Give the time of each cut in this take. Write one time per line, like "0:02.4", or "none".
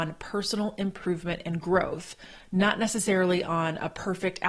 none

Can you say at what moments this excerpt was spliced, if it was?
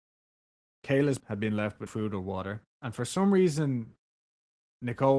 0:01.2
0:01.9
0:02.7

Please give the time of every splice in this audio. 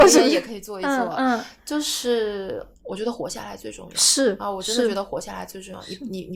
0:02.7

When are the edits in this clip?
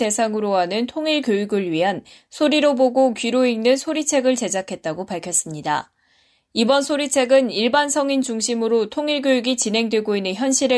none

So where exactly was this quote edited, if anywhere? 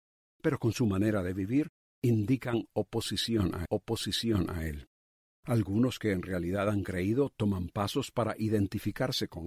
0:03.7

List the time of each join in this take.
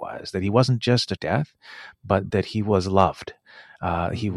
0:01.2
0:02.3

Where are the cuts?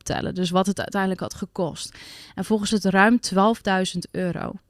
0:02.7

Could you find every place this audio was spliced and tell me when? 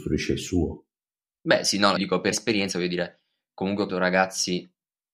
0:02.0
0:02.3
0:03.9

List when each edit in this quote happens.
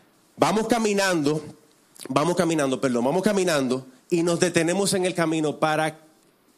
0:04.0

